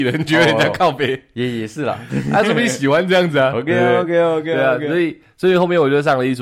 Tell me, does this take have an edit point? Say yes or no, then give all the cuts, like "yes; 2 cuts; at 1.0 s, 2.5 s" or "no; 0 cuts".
no; 0 cuts